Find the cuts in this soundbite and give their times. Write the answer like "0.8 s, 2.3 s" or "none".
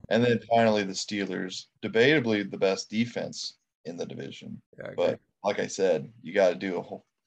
1.7 s, 4.7 s